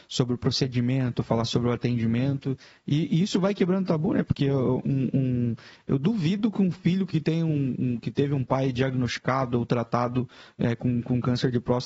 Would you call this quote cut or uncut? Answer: uncut